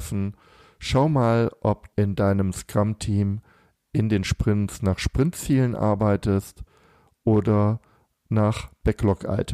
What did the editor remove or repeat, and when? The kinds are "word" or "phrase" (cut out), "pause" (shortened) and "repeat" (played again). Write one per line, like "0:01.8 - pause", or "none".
0:01.9 - word